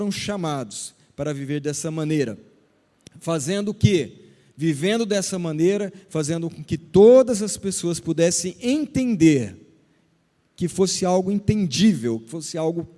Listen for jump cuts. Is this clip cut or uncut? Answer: uncut